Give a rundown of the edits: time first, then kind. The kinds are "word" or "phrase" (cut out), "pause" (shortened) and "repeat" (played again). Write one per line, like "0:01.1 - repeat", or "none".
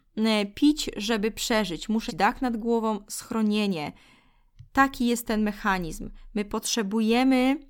0:02.1 - word
0:04.7 - pause